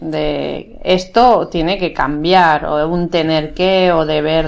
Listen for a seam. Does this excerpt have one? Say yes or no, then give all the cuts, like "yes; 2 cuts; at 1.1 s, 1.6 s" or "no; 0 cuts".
no; 0 cuts